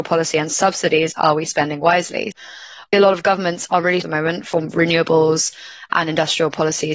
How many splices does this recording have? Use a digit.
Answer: 1